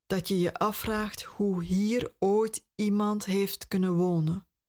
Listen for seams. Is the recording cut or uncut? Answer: uncut